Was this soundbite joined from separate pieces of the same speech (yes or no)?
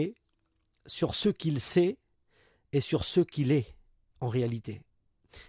no